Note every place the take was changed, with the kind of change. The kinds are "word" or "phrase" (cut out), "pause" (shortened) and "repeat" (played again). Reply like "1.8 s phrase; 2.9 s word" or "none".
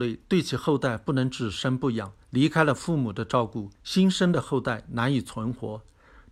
2.2 s pause; 3.7 s pause